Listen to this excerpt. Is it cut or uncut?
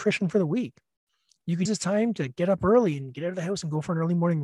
cut